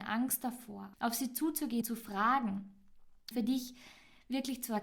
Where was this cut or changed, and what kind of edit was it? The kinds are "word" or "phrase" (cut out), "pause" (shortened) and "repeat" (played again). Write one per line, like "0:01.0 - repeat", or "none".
0:00.9 - phrase
0:01.8 - word
0:03.3 - word